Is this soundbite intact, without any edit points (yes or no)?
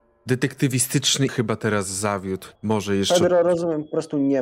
no